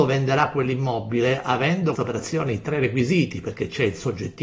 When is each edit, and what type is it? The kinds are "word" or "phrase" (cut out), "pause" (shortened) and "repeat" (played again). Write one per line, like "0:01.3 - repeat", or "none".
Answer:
0:01.9 - word